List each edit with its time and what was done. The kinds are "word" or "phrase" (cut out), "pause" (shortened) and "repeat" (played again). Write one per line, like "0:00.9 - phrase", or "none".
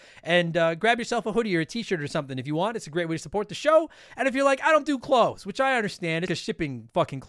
0:06.3 - word